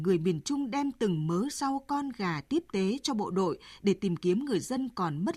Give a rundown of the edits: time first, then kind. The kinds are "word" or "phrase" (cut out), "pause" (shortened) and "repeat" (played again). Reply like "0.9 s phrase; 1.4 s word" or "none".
none

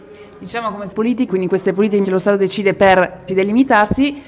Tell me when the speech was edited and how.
0.9 s word; 1.3 s word; 2.0 s word; 3.3 s word

